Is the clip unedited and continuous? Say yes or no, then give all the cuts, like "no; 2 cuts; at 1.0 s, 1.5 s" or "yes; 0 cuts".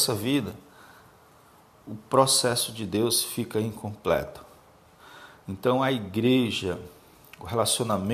yes; 0 cuts